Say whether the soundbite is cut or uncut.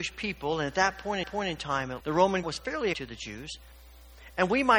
cut